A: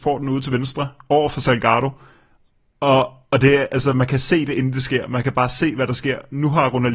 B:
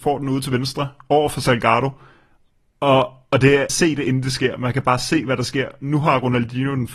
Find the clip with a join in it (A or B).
B